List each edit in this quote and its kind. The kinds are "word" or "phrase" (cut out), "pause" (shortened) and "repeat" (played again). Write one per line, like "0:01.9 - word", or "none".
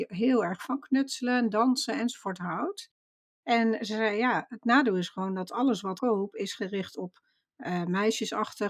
0:06.0 - phrase